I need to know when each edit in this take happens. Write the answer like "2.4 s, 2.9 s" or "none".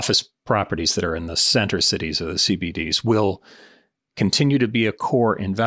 none